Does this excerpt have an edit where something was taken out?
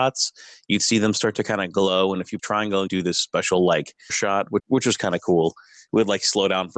yes; 4 cuts; at 2.4 s, 2.9 s, 4.1 s, 4.6 s

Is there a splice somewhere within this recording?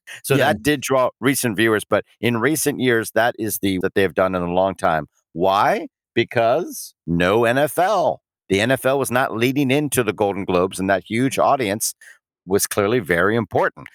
yes; 1 cut; at 3.8 s

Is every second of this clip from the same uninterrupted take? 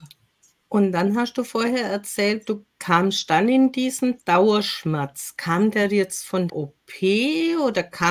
no; 2 cuts; at 4.2 s, 6.5 s

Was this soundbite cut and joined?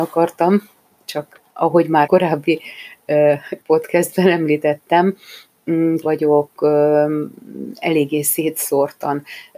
yes; 4 cuts; at 1.5 s, 2.1 s, 3.6 s, 6.0 s

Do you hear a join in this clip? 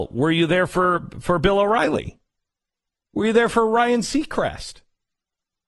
no; 0 cuts

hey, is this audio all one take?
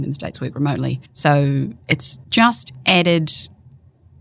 no; 2 cuts; at 1.1 s, 2.2 s

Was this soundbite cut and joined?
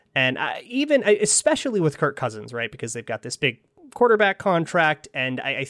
no; 0 cuts

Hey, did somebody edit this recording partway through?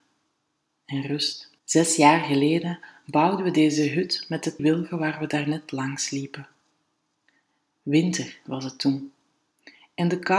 yes; 2 cuts; at 1.6 s, 4.6 s

